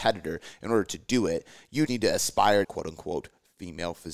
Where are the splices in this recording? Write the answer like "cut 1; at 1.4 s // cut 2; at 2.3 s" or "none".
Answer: cut 1; at 1.9 s // cut 2; at 2.6 s